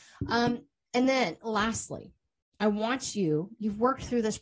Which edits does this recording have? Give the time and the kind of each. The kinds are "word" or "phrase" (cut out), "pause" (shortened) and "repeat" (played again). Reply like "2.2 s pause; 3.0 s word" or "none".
none